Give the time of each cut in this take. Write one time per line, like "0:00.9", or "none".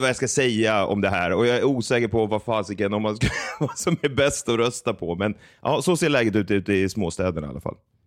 none